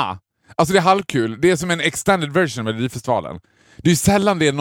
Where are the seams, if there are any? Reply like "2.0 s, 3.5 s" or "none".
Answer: none